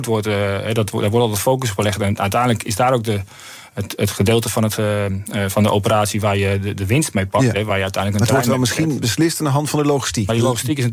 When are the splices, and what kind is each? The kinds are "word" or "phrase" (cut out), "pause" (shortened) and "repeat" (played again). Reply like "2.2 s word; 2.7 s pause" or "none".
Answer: none